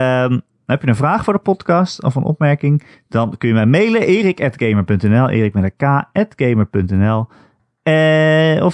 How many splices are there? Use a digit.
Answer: 1